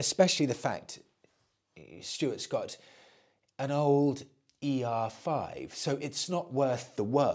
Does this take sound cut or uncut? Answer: uncut